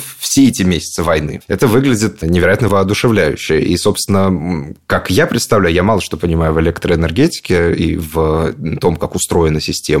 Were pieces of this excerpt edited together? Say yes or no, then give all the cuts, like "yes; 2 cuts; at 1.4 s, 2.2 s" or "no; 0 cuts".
no; 0 cuts